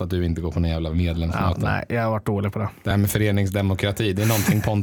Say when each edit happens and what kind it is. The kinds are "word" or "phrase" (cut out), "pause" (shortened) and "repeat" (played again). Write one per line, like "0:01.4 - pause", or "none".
none